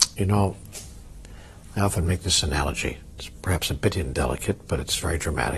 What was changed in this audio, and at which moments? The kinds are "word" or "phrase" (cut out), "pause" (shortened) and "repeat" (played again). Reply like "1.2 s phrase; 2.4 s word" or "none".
none